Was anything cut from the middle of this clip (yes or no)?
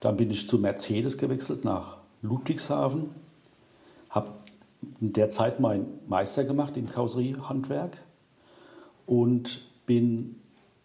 no